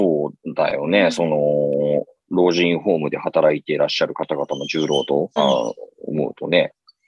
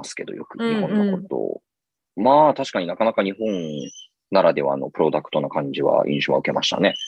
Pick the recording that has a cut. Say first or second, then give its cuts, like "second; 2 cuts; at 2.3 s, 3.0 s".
first; 1 cut; at 5.4 s